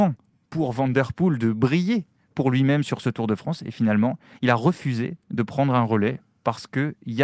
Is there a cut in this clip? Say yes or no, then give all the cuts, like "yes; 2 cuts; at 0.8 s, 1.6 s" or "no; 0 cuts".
no; 0 cuts